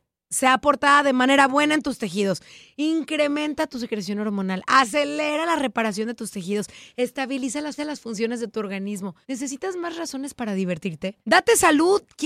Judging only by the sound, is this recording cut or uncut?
cut